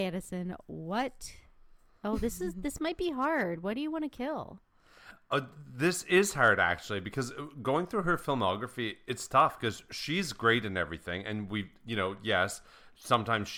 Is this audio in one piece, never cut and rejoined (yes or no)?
yes